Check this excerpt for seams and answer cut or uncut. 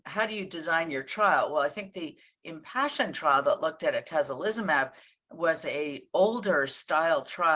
uncut